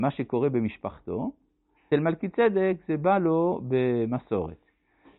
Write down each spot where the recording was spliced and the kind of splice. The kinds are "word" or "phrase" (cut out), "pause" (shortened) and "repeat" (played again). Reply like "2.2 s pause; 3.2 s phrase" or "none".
1.9 s word

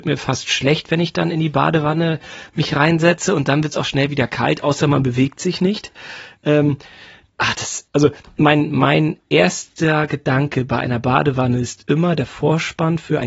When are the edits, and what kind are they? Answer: none

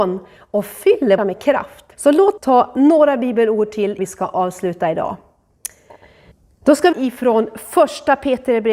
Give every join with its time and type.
1.2 s phrase; 1.9 s pause; 2.4 s word; 4.0 s word; 6.3 s pause; 6.9 s word

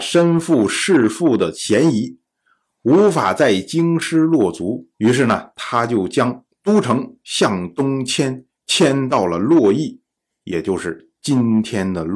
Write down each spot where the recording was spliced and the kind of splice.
4.9 s pause; 8.6 s pause

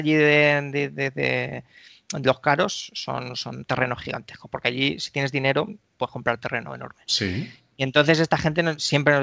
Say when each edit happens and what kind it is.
none

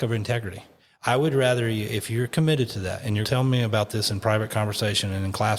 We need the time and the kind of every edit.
3.2 s word

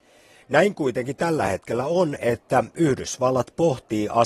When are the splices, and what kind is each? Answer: none

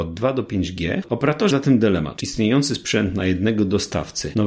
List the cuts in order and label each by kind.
1.5 s word; 2.2 s word

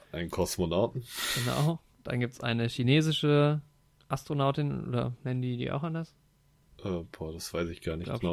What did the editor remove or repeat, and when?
none

